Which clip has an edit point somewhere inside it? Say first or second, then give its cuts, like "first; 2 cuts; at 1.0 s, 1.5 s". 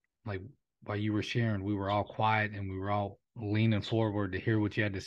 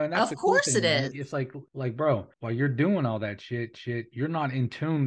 second; 4 cuts; at 1.1 s, 1.7 s, 2.3 s, 3.7 s